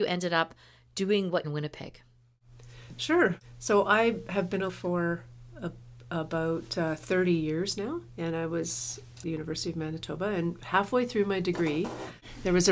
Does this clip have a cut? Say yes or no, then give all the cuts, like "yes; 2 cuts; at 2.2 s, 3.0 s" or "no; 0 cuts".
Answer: yes; 4 cuts; at 1.4 s, 4.7 s, 8.1 s, 9.2 s